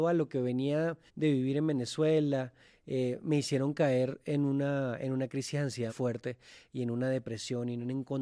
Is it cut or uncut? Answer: cut